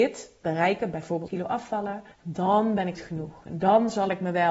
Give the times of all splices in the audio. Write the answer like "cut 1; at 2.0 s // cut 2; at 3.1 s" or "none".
cut 1; at 1.3 s // cut 2; at 2.1 s // cut 3; at 3.0 s

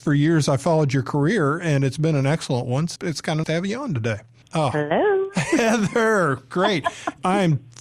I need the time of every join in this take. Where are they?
cut 1; at 3.0 s // cut 2; at 3.4 s

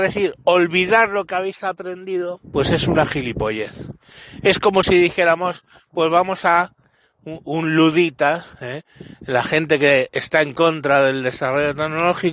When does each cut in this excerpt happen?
cut 1; at 8.5 s

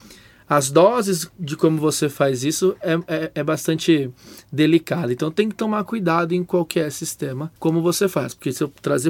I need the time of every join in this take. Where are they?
cut 1; at 7.6 s

